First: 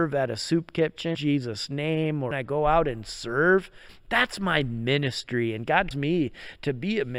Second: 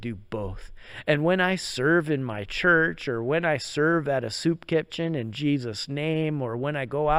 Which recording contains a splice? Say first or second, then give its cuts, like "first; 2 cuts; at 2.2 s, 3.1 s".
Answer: first; 3 cuts; at 1.1 s, 2.3 s, 5.9 s